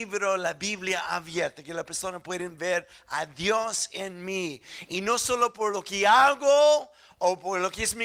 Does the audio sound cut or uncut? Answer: uncut